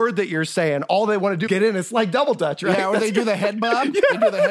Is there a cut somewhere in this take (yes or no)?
yes